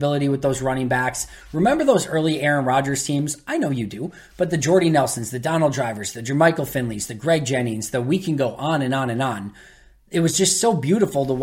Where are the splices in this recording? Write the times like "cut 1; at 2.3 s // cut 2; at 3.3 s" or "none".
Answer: none